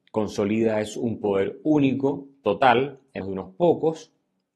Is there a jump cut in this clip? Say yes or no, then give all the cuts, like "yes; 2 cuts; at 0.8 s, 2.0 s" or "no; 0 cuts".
yes; 1 cut; at 3.2 s